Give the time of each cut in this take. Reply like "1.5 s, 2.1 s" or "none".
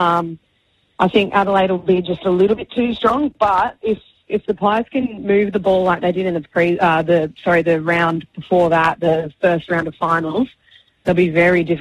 none